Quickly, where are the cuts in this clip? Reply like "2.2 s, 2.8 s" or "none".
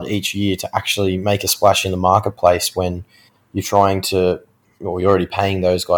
none